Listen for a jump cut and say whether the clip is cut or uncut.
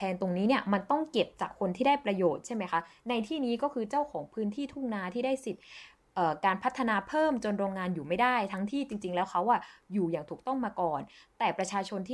uncut